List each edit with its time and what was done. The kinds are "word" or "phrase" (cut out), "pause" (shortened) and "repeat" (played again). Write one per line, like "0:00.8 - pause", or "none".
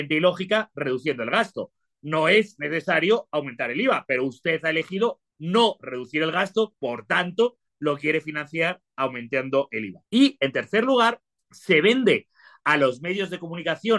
0:05.3 - pause
0:06.8 - pause
0:10.1 - pause
0:11.4 - pause